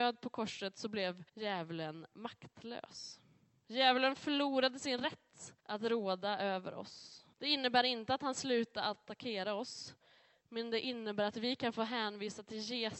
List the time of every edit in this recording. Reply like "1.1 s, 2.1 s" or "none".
1.3 s, 5.6 s, 7.3 s